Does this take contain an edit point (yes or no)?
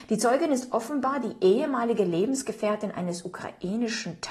no